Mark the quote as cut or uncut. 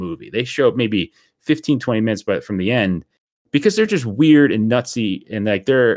uncut